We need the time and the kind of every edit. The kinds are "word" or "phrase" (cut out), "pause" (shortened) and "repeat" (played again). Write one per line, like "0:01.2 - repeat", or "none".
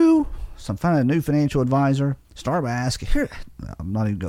0:02.2 - pause